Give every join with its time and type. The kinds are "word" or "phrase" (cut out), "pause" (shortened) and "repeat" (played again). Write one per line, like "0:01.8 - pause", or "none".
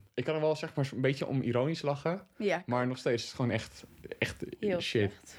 none